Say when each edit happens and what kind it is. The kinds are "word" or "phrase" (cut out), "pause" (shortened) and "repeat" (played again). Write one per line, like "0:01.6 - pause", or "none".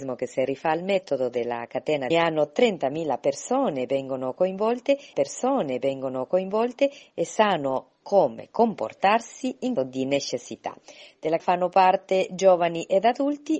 0:02.1 - phrase
0:05.1 - repeat
0:09.8 - word
0:11.4 - word